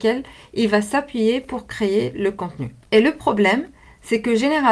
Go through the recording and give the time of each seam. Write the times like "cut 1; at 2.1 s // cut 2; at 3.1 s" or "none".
none